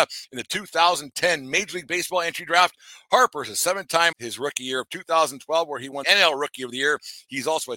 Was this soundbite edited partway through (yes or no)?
yes